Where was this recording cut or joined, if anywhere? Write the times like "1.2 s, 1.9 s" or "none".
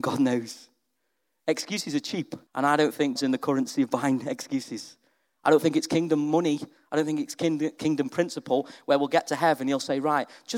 2.5 s, 3.2 s

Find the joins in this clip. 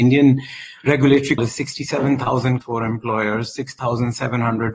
1.4 s, 2.6 s

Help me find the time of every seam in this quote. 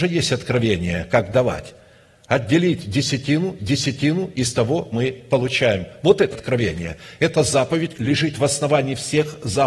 3.6 s, 4.9 s, 6.3 s, 7.9 s

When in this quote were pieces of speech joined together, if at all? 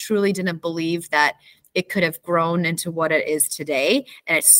none

